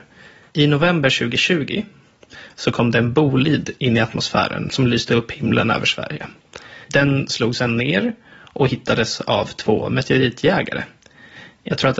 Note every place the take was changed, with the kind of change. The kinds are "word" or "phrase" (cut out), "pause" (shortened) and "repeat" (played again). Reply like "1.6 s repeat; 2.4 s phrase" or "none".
6.8 s pause